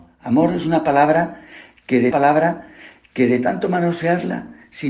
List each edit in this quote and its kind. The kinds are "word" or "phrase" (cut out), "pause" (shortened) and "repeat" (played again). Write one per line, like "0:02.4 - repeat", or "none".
0:02.1 - repeat